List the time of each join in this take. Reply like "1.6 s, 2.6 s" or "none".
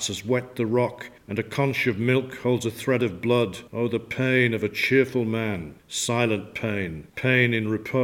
1.2 s, 3.7 s, 5.8 s, 7.1 s